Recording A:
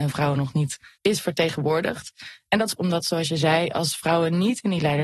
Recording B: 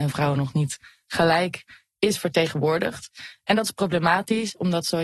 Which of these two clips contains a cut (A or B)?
A